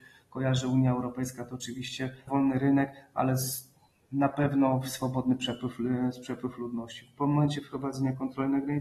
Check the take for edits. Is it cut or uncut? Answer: cut